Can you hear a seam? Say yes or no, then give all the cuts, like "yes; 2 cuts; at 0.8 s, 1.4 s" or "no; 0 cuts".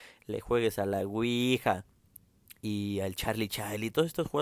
no; 0 cuts